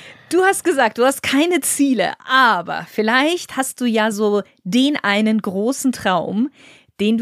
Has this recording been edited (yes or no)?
no